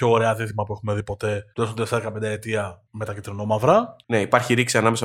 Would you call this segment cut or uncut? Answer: cut